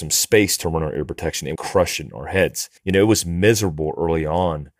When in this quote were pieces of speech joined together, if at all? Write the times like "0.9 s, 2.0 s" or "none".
1.6 s, 2.8 s